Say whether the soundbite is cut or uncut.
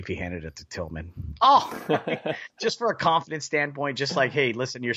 uncut